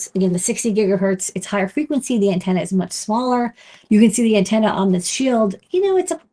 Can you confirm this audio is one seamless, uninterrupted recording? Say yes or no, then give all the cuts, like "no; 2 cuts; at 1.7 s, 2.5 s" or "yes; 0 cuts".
yes; 0 cuts